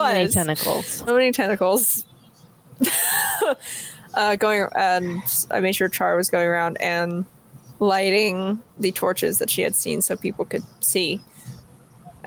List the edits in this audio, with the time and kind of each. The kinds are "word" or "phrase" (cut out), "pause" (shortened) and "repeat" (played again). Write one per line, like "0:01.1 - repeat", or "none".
0:01.1 - word
0:07.8 - pause